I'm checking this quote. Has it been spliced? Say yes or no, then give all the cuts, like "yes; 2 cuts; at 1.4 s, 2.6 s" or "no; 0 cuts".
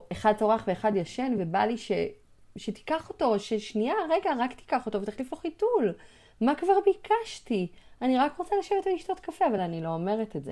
no; 0 cuts